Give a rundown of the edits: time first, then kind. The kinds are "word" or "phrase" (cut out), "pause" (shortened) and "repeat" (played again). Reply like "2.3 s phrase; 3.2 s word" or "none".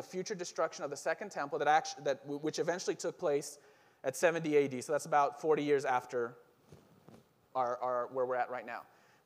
none